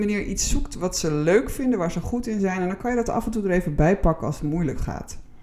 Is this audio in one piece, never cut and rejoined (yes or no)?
yes